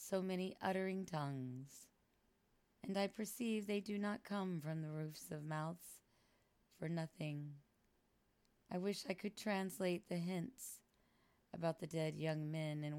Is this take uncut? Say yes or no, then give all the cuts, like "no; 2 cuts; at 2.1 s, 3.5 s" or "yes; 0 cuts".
yes; 0 cuts